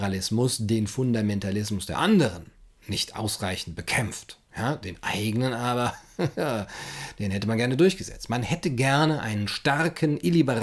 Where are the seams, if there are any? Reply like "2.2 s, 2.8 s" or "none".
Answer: 4.5 s